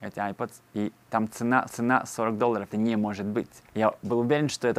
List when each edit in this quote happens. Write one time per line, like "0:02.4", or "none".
0:01.7
0:02.7
0:03.7